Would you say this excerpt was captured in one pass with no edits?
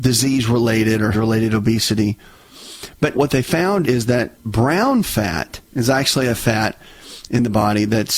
no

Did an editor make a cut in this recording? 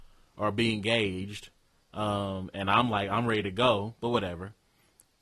no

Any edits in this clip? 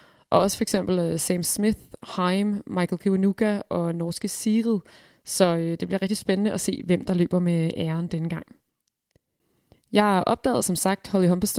no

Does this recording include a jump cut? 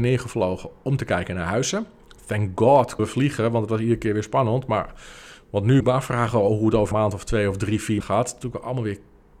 yes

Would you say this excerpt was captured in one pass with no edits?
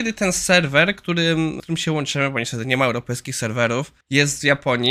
no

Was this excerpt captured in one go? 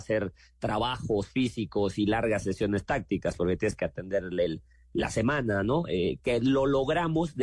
yes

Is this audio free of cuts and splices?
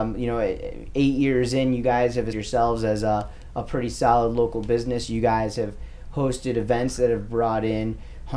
no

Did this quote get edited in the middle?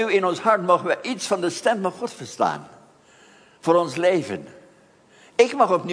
no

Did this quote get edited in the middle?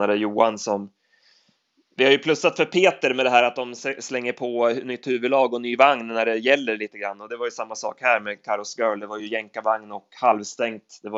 no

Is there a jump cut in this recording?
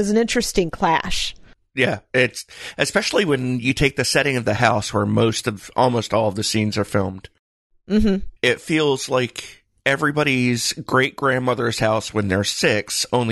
yes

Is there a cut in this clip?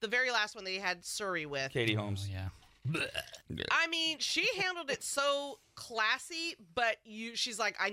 yes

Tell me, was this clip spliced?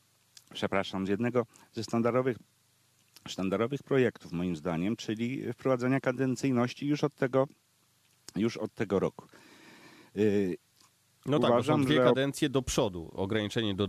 no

